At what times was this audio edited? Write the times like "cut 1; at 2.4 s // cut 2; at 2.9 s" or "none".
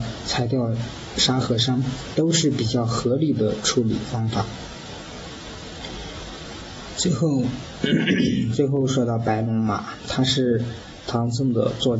none